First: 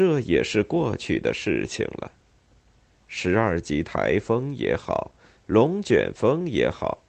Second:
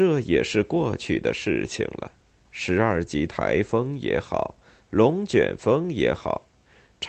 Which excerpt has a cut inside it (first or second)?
second